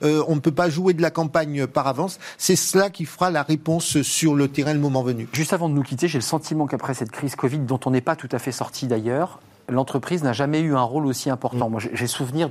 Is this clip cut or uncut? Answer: uncut